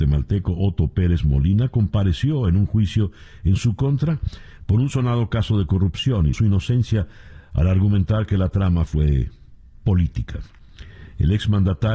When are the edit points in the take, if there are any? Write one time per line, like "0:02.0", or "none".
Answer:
0:06.3